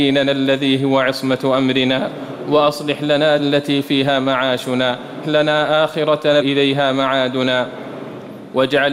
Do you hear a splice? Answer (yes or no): yes